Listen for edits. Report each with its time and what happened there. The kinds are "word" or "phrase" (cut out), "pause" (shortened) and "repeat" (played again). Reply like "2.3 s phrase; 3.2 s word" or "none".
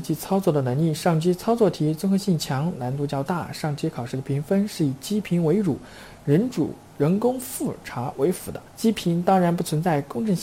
8.7 s pause